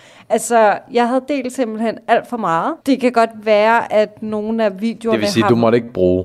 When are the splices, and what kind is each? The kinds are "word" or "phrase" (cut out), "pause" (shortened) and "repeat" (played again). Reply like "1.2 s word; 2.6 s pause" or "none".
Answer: 2.8 s pause